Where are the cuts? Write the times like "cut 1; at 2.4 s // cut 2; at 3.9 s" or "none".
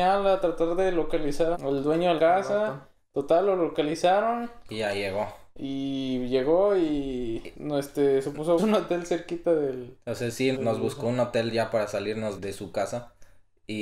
cut 1; at 1.5 s // cut 2; at 2.2 s // cut 3; at 7.5 s // cut 4; at 8.6 s // cut 5; at 10.5 s // cut 6; at 12.4 s